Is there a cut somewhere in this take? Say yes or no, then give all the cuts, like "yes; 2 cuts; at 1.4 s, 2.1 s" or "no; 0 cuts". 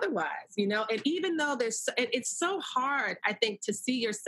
no; 0 cuts